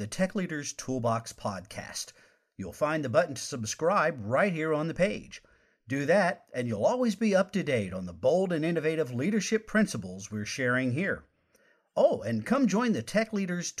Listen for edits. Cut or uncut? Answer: uncut